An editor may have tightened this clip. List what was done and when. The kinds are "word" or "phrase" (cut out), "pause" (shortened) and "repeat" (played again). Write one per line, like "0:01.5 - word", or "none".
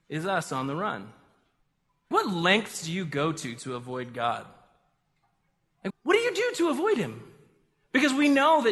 0:02.1 - word
0:05.9 - word